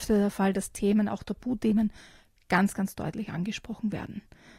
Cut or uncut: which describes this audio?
uncut